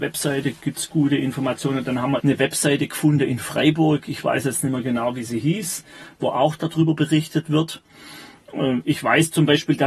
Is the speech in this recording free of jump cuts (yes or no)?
no